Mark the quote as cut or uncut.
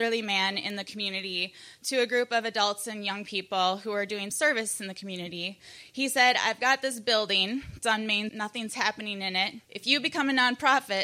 cut